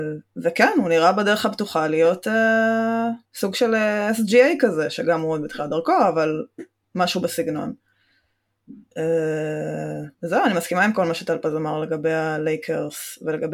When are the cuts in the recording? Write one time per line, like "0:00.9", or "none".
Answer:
0:03.2
0:06.8
0:10.1